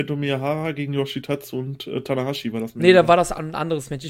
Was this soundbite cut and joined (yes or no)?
no